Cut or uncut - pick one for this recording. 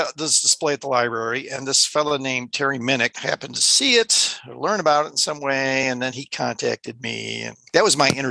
uncut